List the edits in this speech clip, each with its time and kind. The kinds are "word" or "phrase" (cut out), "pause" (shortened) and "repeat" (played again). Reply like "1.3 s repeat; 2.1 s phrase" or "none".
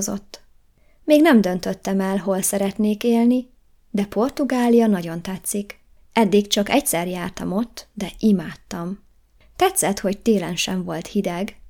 none